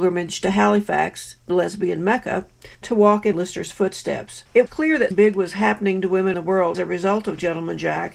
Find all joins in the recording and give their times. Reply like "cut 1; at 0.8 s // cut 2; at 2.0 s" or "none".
cut 1; at 1.5 s // cut 2; at 2.7 s // cut 3; at 3.3 s // cut 4; at 4.7 s // cut 5; at 5.1 s // cut 6; at 6.3 s // cut 7; at 6.7 s